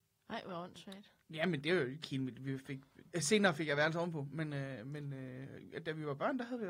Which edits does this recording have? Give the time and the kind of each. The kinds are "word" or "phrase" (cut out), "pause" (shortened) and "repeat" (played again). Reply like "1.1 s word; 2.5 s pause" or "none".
1.2 s pause; 2.0 s phrase; 3.1 s phrase